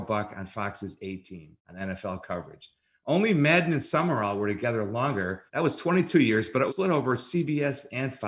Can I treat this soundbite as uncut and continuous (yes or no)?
no